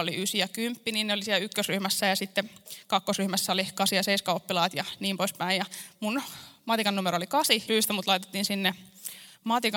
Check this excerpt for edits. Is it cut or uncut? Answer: cut